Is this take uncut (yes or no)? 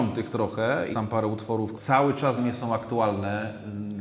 no